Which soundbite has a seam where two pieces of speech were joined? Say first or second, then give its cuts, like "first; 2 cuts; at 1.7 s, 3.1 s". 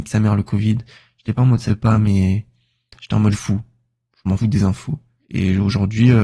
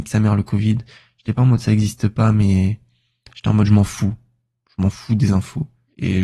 first; 3 cuts; at 1.7 s, 3.3 s, 4.4 s